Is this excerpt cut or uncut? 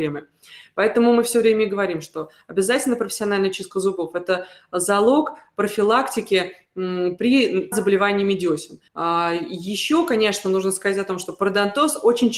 cut